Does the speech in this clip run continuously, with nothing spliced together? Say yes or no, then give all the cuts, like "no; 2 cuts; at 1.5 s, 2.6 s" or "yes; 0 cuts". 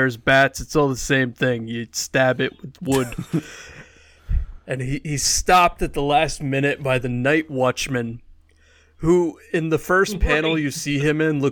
yes; 0 cuts